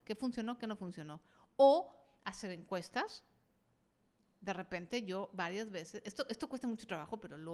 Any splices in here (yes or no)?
no